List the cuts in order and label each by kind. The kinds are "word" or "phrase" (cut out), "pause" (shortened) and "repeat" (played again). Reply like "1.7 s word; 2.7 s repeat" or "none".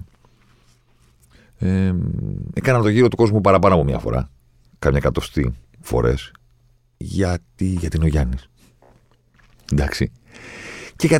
none